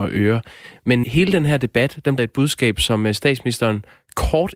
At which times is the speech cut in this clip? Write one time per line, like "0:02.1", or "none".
0:01.0
0:02.2